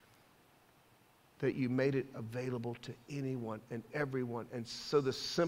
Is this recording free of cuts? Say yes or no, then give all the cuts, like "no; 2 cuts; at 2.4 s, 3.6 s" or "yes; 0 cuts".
yes; 0 cuts